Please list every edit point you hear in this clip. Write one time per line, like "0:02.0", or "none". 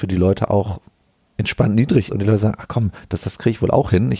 0:02.1

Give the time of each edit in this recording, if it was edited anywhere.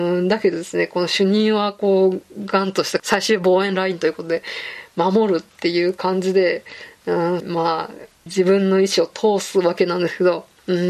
0:03.0
0:07.4
0:08.3

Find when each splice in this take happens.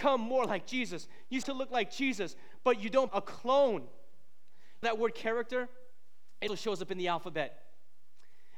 0:01.4
0:03.1
0:04.8
0:06.5

